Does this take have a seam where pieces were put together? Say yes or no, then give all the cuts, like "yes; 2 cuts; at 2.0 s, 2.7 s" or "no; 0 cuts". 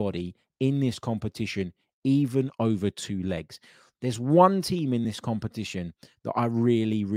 no; 0 cuts